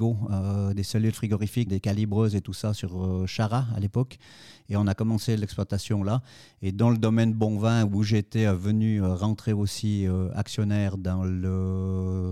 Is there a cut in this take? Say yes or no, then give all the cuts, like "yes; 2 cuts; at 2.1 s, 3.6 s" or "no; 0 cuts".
yes; 1 cut; at 1.7 s